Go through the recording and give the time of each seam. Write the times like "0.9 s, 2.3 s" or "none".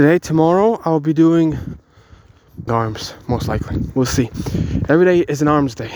2.7 s